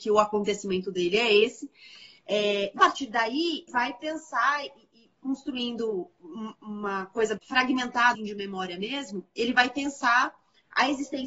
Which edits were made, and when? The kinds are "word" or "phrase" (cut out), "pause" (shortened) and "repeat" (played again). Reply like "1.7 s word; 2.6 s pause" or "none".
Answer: 2.8 s word; 3.7 s word; 7.4 s word; 8.1 s word